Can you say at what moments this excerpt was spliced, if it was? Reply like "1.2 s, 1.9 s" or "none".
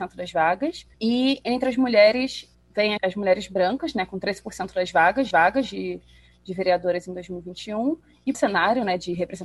0.9 s, 3.0 s, 5.3 s, 8.3 s